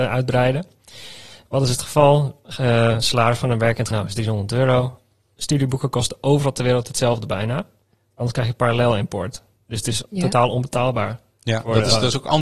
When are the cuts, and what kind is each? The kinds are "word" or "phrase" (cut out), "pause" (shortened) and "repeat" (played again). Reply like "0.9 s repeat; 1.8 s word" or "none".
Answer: 3.9 s word